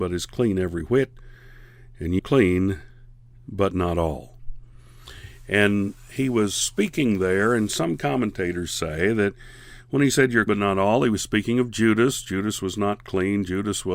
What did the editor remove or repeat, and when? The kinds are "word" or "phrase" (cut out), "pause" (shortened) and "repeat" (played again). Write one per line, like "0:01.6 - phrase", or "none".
0:02.2 - word
0:10.5 - word